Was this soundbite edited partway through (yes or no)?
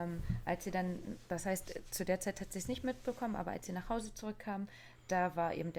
no